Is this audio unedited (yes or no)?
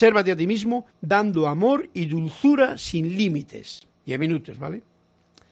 no